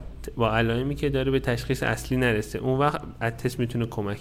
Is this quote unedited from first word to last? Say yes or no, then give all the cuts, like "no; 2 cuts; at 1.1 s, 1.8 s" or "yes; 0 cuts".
yes; 0 cuts